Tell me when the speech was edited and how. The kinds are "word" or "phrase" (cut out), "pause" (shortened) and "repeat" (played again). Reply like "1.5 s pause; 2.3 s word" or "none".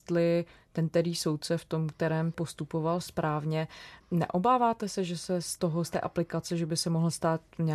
2.3 s word